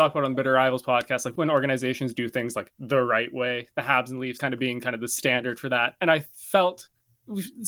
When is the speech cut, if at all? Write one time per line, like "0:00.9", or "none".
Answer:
0:01.4
0:04.4